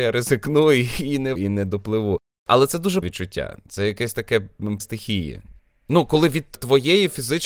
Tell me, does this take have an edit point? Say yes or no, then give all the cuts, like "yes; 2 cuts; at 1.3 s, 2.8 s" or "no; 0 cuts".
yes; 3 cuts; at 1.4 s, 3.0 s, 4.8 s